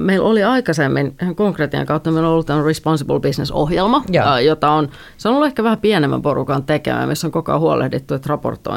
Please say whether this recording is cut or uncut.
uncut